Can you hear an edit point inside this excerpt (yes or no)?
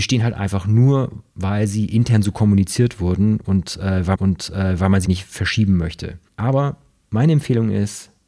yes